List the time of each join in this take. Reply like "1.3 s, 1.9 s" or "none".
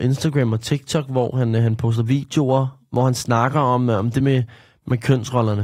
none